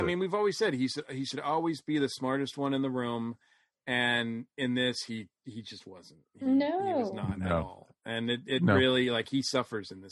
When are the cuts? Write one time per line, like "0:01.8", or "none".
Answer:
none

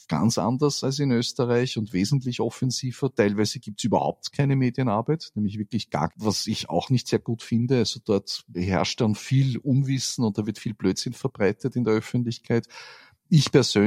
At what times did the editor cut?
0:06.1

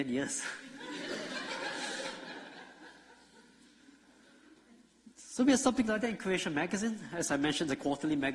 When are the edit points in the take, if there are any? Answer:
none

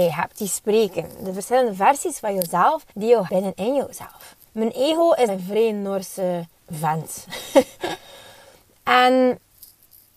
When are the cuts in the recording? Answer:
0:02.9
0:03.3
0:04.5
0:05.3
0:06.6

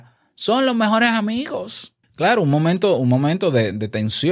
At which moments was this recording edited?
0:02.0

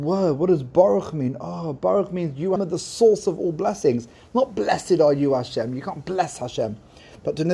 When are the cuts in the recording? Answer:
0:02.6

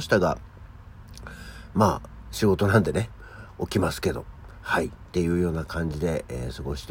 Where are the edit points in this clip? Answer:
0:04.5

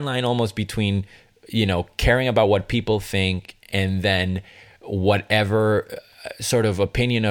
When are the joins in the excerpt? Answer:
none

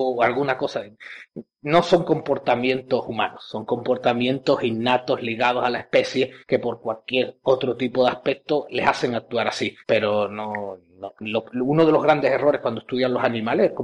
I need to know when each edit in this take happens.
0:06.4
0:09.8

